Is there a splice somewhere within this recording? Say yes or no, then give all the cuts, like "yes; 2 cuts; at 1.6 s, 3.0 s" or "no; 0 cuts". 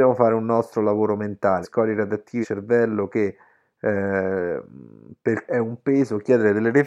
yes; 3 cuts; at 1.6 s, 2.4 s, 5.5 s